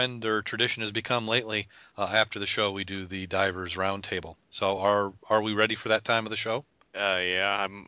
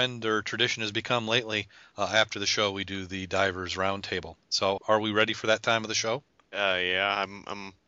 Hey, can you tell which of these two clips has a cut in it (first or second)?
second